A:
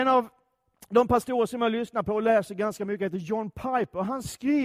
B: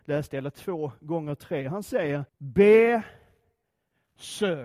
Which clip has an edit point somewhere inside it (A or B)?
B